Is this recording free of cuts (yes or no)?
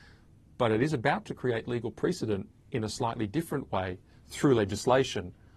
yes